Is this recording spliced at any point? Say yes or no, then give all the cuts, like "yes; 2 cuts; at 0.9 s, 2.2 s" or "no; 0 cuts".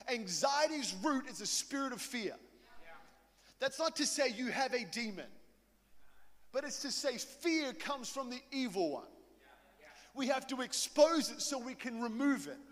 no; 0 cuts